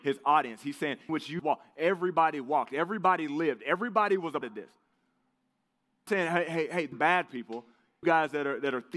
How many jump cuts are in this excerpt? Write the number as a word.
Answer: six